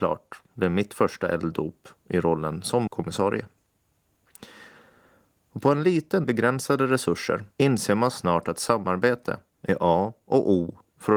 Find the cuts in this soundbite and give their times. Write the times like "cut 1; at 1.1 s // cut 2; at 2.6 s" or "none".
cut 1; at 2.9 s // cut 2; at 6.2 s // cut 3; at 7.5 s